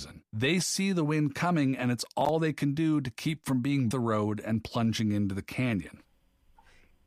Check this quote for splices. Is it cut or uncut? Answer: cut